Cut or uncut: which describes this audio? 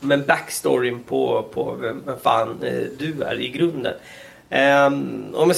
uncut